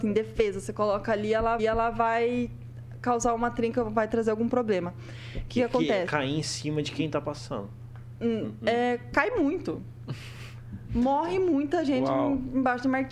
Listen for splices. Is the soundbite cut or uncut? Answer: cut